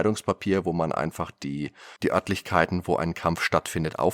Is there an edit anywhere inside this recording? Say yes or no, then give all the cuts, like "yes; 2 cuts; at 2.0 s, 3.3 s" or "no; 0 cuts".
yes; 1 cut; at 2.0 s